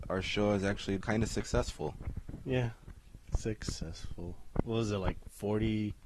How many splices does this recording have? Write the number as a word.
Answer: two